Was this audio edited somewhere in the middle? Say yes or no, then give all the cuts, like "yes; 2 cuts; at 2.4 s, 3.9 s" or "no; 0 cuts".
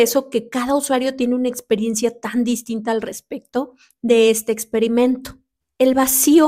no; 0 cuts